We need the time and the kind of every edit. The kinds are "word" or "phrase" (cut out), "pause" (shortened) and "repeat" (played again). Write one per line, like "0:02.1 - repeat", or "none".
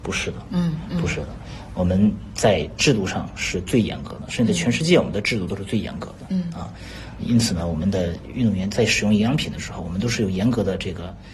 0:07.2 - word